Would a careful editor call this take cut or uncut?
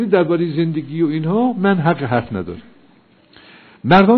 uncut